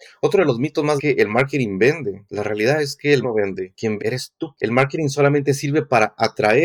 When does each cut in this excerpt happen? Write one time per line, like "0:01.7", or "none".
0:01.0
0:03.2
0:04.0
0:04.6